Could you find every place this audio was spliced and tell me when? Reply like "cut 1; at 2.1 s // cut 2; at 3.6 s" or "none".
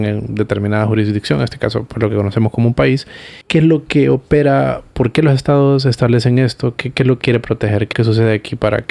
cut 1; at 3.4 s // cut 2; at 7.2 s // cut 3; at 7.9 s